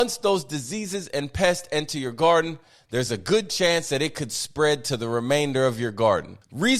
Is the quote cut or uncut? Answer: uncut